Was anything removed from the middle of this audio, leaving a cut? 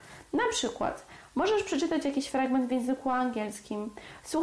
no; 0 cuts

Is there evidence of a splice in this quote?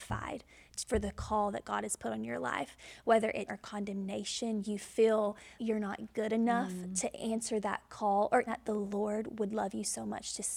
yes; 3 cuts; at 3.5 s, 5.6 s, 8.5 s

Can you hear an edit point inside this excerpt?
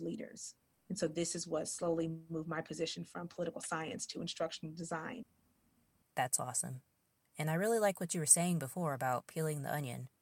no; 0 cuts

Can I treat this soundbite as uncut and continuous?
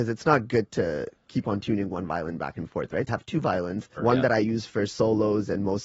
no; 2 cuts; at 3.1 s, 4.0 s

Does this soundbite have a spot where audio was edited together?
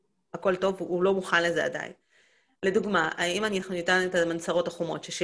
no; 0 cuts

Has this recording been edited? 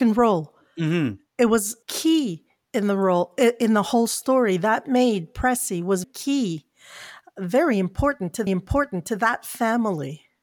yes; 3 cuts; at 1.8 s, 6.0 s, 8.5 s

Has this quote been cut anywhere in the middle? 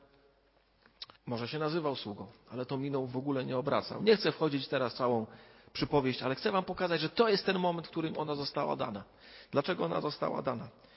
yes; 3 cuts; at 1.2 s, 3.1 s, 4.9 s

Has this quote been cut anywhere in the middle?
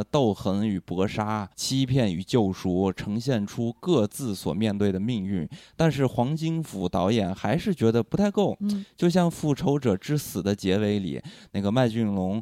yes; 1 cut; at 1.5 s

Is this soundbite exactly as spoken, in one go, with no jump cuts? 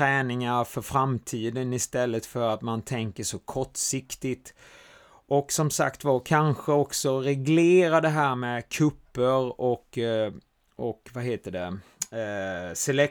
yes; 0 cuts

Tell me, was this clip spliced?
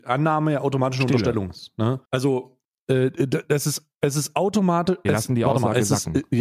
yes; 1 cut; at 2.1 s

